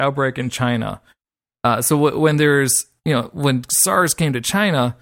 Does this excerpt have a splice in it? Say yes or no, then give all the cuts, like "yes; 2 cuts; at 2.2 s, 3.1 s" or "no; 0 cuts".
no; 0 cuts